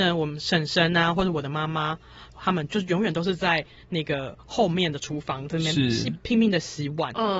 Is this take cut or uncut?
uncut